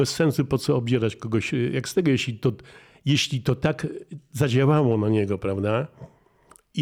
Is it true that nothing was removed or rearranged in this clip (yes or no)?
yes